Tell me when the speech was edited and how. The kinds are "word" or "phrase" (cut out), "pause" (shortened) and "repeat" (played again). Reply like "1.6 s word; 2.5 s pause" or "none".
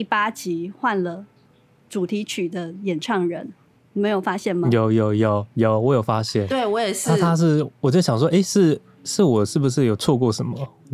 none